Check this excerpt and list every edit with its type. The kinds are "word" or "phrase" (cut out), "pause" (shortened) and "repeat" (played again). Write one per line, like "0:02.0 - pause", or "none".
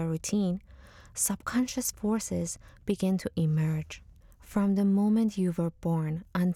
none